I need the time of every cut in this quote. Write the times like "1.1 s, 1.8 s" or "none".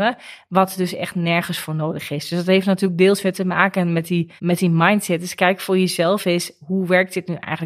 4.4 s